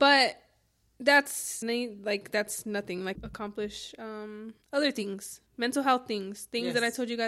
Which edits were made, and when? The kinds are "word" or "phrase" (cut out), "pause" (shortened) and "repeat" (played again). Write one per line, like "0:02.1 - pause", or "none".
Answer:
0:01.6 - word
0:03.1 - phrase
0:04.6 - pause
0:05.5 - pause